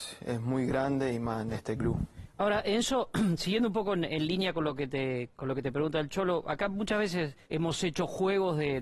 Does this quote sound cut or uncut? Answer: cut